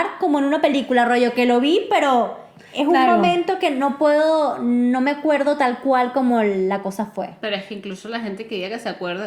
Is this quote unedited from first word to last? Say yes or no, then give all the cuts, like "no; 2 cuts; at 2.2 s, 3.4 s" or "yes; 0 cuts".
yes; 0 cuts